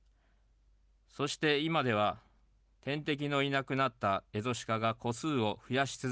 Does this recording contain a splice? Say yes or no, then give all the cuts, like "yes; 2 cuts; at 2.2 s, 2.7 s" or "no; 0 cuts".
no; 0 cuts